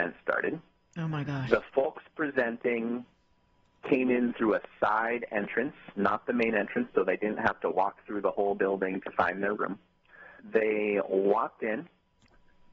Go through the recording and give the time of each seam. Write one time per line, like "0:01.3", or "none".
none